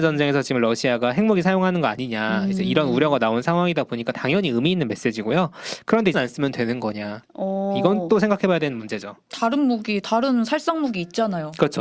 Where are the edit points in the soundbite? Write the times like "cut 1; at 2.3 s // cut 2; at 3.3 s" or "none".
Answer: cut 1; at 6.1 s